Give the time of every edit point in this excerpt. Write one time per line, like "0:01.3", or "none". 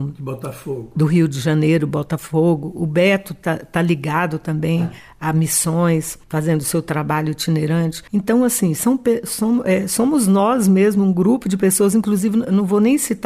0:06.2
0:08.1

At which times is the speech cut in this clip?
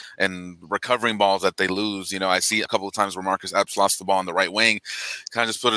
0:02.7

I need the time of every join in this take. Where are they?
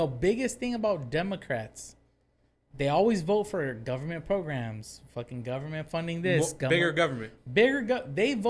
none

